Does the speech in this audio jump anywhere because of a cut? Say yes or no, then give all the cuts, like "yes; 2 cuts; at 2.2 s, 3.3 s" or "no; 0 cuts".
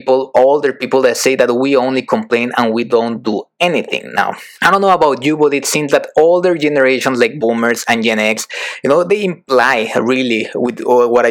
yes; 1 cut; at 4.5 s